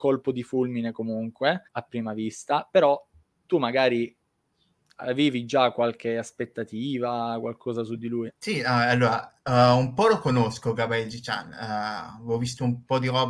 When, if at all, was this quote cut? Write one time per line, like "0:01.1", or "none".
0:01.7
0:08.4